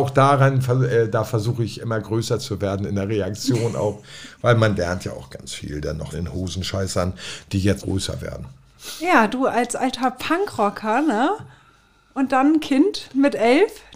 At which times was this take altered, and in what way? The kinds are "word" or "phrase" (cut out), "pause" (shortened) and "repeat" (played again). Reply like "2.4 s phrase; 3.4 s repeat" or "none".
6.1 s word; 7.8 s word